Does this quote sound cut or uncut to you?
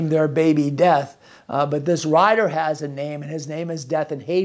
uncut